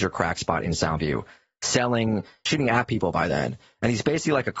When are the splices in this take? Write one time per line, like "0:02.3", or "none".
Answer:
0:02.5